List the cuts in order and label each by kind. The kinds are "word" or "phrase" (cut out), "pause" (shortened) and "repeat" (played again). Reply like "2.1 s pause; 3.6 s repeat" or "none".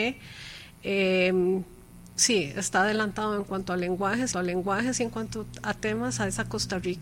4.3 s repeat